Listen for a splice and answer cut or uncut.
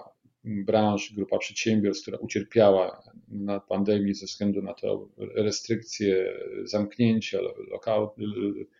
uncut